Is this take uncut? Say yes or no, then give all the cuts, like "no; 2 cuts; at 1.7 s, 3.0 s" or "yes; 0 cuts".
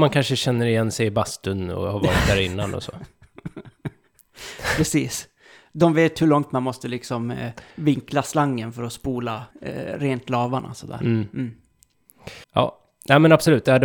no; 3 cuts; at 7.7 s, 9.5 s, 12.4 s